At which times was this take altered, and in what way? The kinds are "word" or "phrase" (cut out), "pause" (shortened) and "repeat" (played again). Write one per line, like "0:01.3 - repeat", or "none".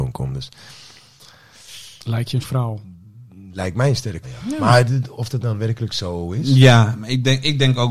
0:02.4 - word
0:04.2 - word
0:05.2 - word

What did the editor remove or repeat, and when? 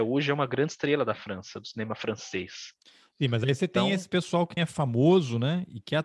0:04.6 - word

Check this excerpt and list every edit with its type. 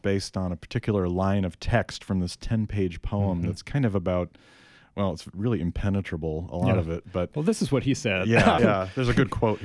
0:08.6 - word

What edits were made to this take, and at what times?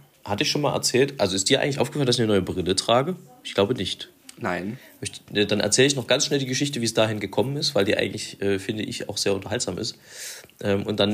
none

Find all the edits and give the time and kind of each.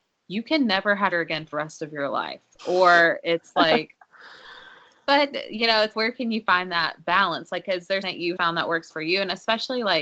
0:01.1 - word
0:01.5 - word
0:05.9 - word
0:08.0 - word
0:08.4 - word
0:08.9 - word

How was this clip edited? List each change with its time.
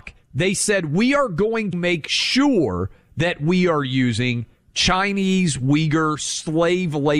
0:01.7 - word

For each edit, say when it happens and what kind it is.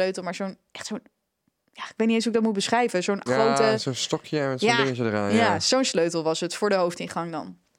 0:03.3 - word

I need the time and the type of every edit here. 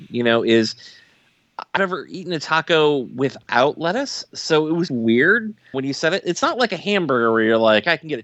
0:01.8 - phrase
0:04.9 - word
0:05.7 - word

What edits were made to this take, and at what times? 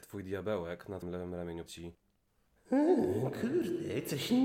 0:01.0 - word
0:01.7 - word

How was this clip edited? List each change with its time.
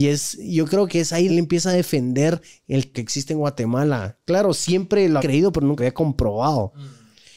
0:01.3 - word
0:02.9 - word
0:05.2 - word
0:05.8 - word

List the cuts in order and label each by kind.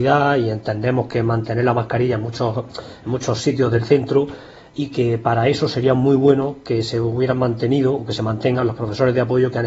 none

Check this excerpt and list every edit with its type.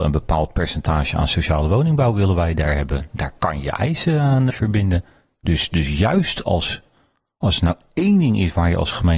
0:04.5 - word

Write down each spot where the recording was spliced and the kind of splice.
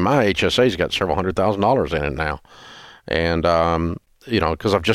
none

